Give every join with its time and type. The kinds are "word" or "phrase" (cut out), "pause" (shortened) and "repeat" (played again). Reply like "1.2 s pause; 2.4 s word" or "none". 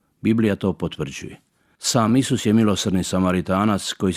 none